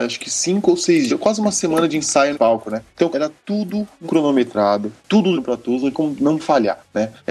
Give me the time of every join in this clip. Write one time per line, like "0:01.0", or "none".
0:01.1
0:02.3
0:03.1
0:04.0
0:05.3
0:05.9
0:06.4